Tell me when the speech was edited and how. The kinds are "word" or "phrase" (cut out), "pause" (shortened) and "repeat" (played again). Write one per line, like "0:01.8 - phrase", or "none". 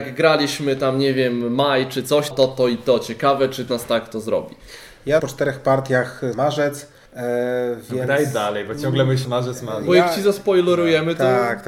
0:02.3 - phrase
0:03.7 - phrase
0:05.2 - phrase
0:06.3 - word
0:07.1 - pause
0:09.2 - word